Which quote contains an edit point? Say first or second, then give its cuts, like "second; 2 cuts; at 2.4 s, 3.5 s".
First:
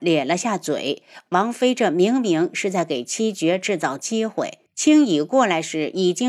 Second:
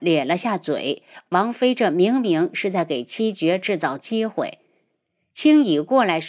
first; 1 cut; at 4.7 s